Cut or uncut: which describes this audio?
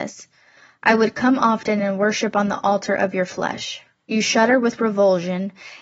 uncut